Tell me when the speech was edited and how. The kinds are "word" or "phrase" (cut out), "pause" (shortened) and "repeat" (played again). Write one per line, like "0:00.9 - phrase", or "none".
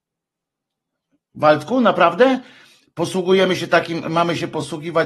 none